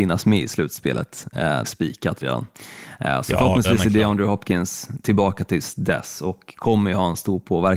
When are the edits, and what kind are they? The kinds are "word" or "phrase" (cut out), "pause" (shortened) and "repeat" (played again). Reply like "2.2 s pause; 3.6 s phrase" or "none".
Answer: 1.6 s word